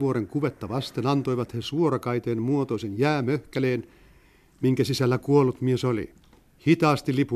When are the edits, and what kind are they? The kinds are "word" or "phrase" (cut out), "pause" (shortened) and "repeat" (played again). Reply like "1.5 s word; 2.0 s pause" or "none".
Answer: none